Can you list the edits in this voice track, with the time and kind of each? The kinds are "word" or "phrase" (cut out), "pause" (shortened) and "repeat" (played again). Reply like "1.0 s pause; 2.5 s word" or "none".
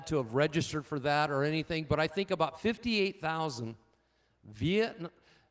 none